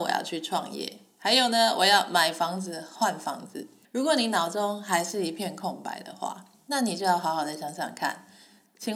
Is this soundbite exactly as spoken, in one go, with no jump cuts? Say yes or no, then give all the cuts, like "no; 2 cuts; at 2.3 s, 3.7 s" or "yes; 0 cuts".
no; 1 cut; at 3.8 s